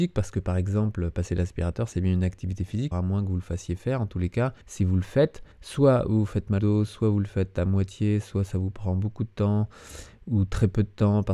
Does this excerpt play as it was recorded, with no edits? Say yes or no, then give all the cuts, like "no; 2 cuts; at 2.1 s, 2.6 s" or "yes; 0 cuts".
no; 4 cuts; at 2.9 s, 4.6 s, 5.5 s, 6.6 s